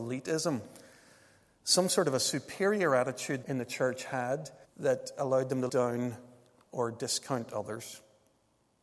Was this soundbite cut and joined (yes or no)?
yes